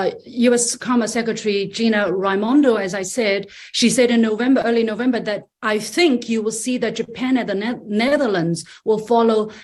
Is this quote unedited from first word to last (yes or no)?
no